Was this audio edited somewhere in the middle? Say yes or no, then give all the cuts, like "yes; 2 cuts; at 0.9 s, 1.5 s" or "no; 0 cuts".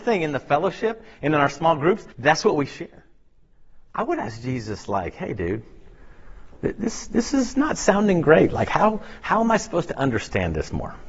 yes; 1 cut; at 2.1 s